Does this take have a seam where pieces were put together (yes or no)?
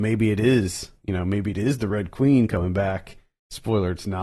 no